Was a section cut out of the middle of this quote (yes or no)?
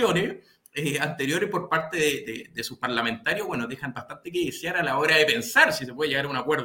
no